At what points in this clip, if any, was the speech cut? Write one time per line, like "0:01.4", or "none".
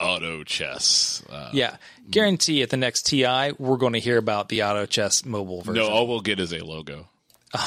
none